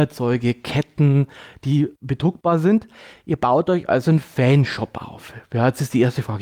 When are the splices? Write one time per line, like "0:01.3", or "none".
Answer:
none